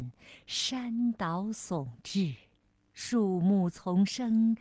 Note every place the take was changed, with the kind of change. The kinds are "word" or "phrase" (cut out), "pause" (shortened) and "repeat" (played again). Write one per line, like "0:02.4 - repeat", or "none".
0:02.6 - pause